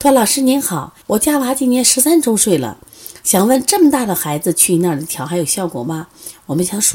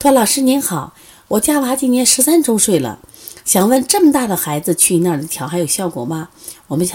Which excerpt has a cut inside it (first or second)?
first